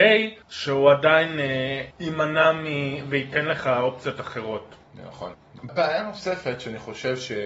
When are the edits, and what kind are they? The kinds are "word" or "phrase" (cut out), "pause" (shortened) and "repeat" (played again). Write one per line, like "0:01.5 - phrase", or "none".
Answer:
0:04.8 - pause